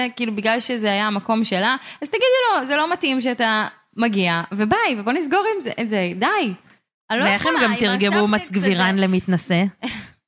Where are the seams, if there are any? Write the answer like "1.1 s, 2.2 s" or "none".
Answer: none